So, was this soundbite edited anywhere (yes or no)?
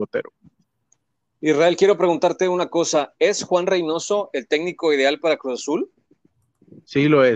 no